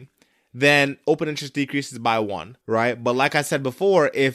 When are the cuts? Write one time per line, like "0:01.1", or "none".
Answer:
0:02.6